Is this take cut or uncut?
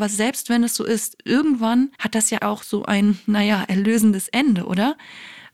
cut